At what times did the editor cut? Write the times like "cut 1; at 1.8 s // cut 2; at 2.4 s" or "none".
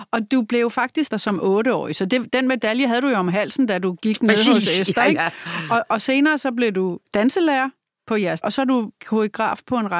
cut 1; at 1.1 s // cut 2; at 7.1 s // cut 3; at 8.4 s // cut 4; at 9.0 s